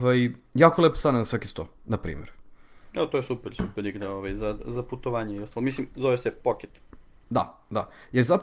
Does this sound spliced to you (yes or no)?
yes